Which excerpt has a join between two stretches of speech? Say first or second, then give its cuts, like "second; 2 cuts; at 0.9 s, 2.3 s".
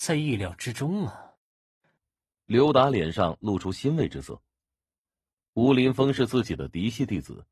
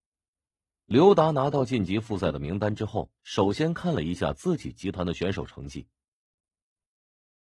second; 1 cut; at 3.2 s